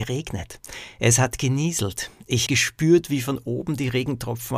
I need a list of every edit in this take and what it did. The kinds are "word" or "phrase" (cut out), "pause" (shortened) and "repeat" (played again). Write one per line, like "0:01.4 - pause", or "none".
0:02.5 - word